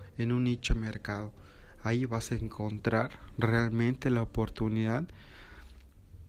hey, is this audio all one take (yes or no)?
yes